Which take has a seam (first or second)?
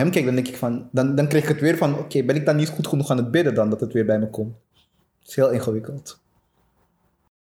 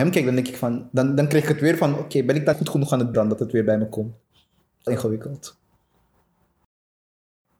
second